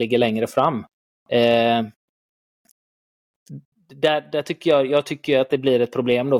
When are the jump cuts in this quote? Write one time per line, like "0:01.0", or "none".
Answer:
none